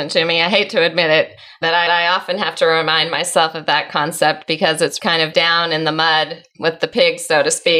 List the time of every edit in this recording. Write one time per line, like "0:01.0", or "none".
0:01.9
0:05.0
0:05.3